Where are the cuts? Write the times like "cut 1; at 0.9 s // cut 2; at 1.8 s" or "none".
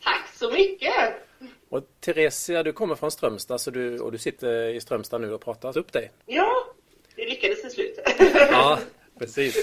cut 1; at 4.4 s // cut 2; at 5.7 s // cut 3; at 6.2 s